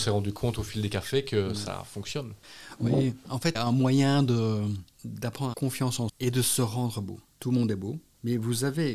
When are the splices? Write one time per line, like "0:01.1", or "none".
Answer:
0:03.5
0:05.5
0:06.1